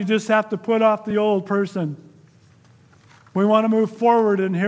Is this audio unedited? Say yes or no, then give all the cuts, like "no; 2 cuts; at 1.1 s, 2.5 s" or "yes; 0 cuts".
yes; 0 cuts